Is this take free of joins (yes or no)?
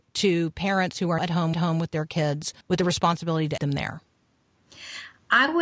no